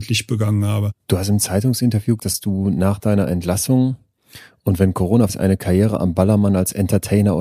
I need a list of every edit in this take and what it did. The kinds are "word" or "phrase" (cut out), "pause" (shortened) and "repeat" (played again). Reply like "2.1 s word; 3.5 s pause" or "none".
2.2 s word; 5.3 s word